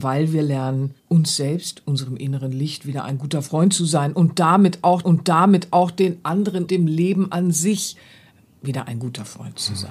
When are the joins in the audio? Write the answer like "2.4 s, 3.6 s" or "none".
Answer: 1.0 s, 5.0 s, 6.7 s